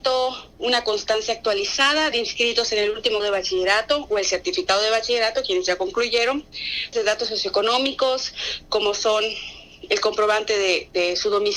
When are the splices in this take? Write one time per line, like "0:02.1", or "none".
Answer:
0:02.1
0:03.2
0:06.9